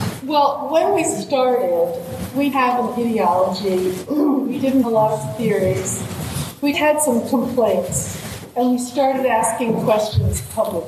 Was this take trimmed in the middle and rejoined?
yes; 3 cuts; at 2.5 s, 4.8 s, 6.7 s

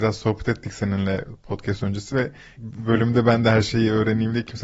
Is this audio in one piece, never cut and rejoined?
yes; 0 cuts

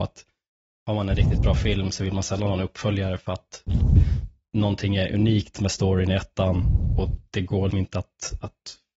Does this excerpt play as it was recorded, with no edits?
no; 1 cut; at 7.7 s

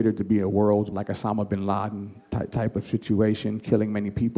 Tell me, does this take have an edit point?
yes; 1 cut; at 0.9 s

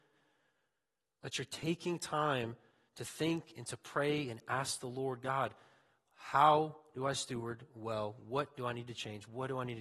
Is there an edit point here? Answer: no; 0 cuts

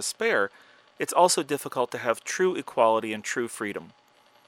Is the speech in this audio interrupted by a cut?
no; 0 cuts

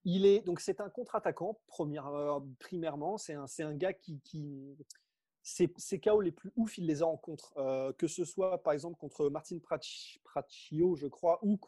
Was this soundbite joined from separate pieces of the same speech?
no; 0 cuts

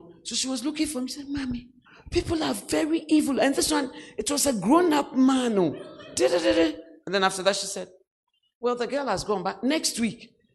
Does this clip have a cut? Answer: yes; 1 cut; at 1.9 s

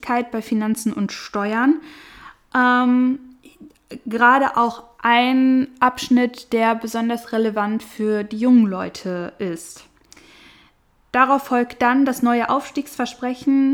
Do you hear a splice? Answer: no; 0 cuts

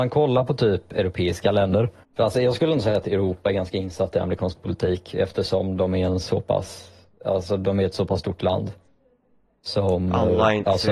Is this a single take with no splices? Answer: no; 1 cut; at 2.0 s

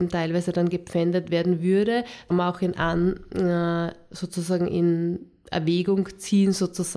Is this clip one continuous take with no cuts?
no; 1 cut; at 2.3 s

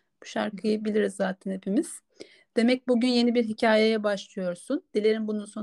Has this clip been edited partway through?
no; 0 cuts

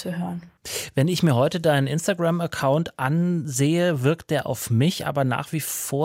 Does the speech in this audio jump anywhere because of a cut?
no; 0 cuts

